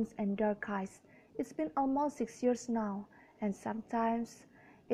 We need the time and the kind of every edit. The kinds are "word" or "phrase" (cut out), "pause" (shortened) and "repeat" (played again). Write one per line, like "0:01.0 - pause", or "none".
none